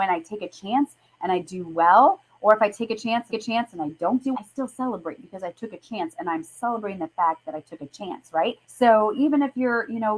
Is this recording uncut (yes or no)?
no